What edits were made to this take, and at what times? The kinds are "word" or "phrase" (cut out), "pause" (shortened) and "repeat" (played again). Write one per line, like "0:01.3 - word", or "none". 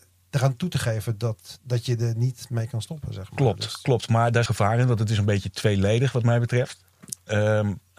0:04.5 - phrase